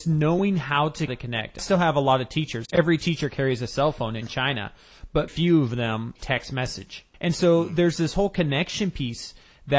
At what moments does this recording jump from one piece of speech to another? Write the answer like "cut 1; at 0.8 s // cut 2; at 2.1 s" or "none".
cut 1; at 1.1 s // cut 2; at 1.6 s // cut 3; at 4.2 s // cut 4; at 5.3 s // cut 5; at 6.2 s // cut 6; at 7.1 s